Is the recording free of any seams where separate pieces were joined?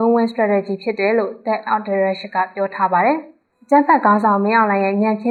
no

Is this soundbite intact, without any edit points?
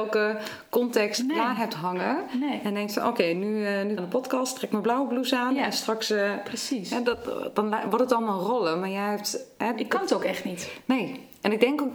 no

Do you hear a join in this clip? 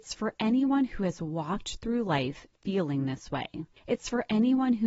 no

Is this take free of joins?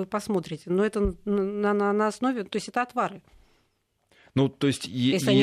yes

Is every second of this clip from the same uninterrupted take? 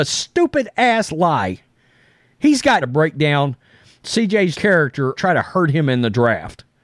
no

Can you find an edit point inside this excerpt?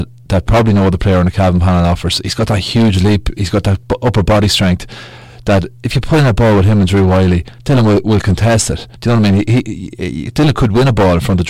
yes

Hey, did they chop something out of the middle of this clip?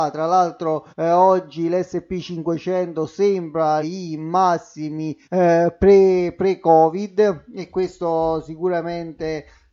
yes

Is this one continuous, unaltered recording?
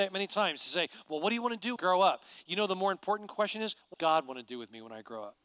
no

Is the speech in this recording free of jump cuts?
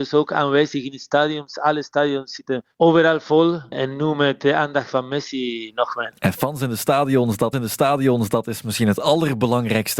no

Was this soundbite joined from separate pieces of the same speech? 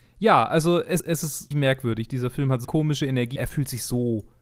yes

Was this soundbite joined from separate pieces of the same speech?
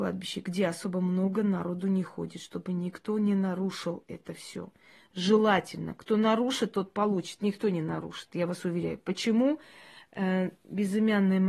no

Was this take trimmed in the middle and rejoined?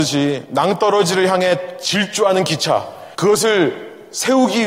yes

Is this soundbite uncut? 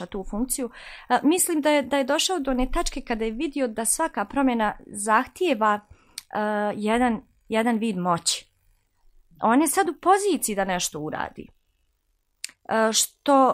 yes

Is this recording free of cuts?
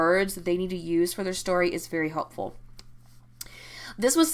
yes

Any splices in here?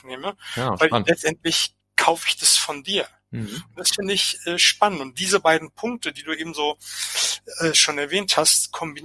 no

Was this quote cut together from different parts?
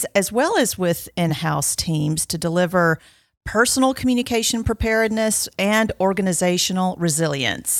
no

